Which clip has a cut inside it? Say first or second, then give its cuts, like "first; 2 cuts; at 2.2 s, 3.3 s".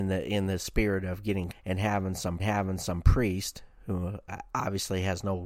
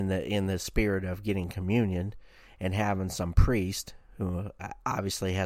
first; 2 cuts; at 1.5 s, 2.4 s